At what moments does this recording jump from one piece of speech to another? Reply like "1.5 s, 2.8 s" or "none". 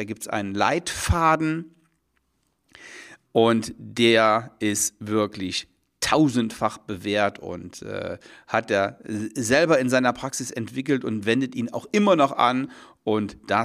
none